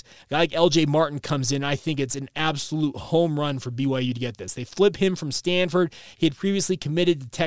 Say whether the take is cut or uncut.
uncut